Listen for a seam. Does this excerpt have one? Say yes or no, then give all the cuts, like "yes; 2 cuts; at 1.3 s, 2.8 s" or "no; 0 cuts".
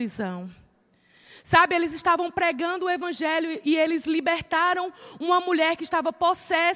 no; 0 cuts